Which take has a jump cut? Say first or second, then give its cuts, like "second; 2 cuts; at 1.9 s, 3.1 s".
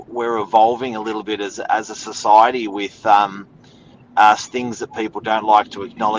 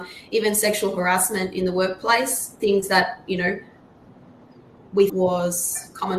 second; 1 cut; at 5.1 s